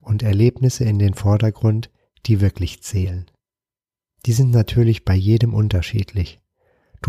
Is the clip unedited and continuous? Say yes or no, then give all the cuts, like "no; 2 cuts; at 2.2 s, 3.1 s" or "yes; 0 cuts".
yes; 0 cuts